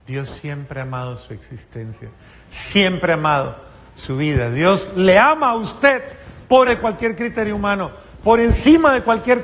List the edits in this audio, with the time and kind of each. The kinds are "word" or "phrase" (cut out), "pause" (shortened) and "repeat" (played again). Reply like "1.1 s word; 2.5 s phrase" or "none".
6.7 s word